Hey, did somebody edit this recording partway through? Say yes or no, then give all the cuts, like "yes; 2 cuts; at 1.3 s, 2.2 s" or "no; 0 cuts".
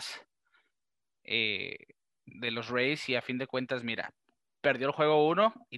no; 0 cuts